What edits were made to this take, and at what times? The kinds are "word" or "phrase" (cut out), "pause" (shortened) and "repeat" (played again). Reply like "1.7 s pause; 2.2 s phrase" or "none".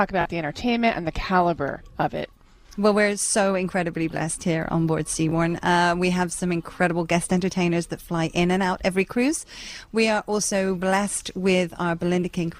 none